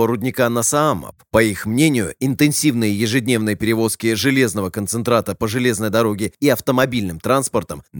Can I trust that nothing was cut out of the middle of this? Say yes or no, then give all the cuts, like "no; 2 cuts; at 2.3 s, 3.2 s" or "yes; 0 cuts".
yes; 0 cuts